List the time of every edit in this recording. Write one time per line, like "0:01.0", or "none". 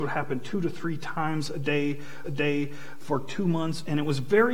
0:02.2